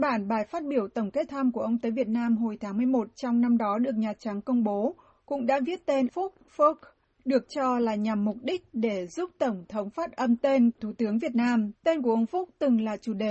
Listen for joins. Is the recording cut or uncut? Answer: cut